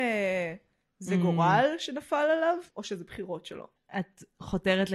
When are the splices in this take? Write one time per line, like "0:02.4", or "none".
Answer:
0:02.7
0:03.8